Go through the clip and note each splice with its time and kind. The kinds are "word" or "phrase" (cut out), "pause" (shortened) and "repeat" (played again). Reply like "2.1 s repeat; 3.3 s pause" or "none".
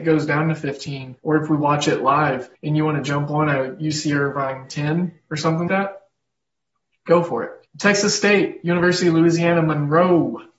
1.2 s pause; 2.5 s pause; 5.7 s word; 7.7 s pause